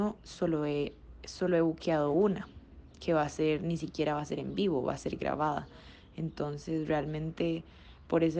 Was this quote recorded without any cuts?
yes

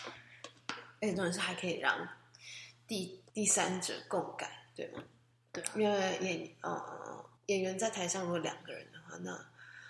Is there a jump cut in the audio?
yes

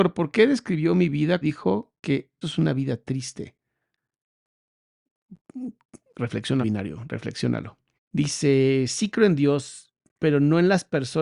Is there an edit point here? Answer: yes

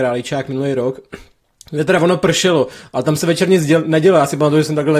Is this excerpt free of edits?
yes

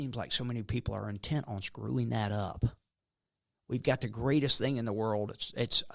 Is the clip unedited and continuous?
yes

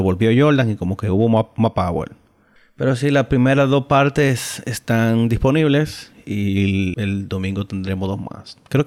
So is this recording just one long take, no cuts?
no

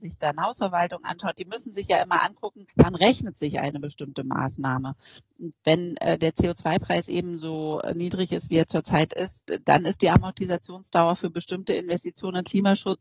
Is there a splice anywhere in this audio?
yes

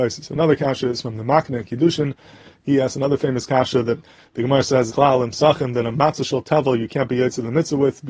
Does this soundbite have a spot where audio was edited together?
yes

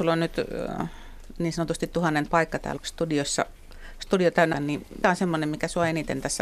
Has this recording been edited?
yes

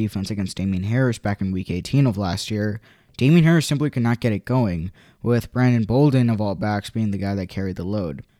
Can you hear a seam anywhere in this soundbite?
no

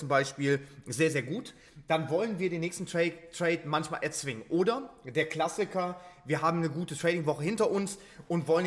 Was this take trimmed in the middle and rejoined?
no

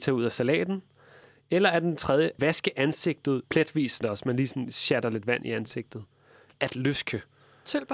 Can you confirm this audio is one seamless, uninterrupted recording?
no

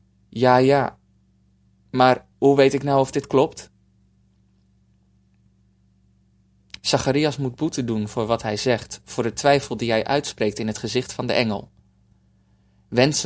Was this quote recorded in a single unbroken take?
yes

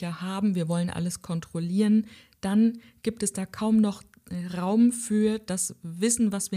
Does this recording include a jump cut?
no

